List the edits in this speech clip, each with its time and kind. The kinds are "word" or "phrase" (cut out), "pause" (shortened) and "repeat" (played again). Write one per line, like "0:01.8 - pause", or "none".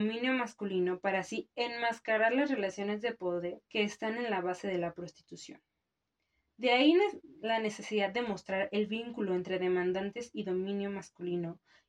0:03.7 - pause